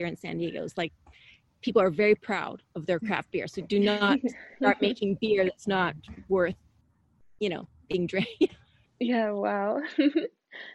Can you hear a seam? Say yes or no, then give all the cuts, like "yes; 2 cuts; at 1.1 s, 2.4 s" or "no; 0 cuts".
no; 0 cuts